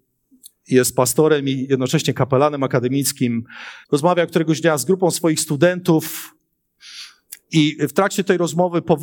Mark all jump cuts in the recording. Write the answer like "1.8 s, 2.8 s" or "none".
3.8 s, 7.4 s